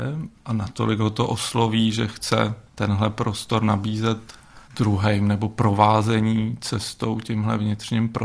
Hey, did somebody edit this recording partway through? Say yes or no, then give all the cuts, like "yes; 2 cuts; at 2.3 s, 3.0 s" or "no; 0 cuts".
yes; 2 cuts; at 2.7 s, 4.7 s